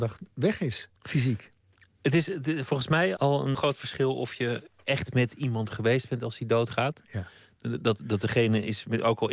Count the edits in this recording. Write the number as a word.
three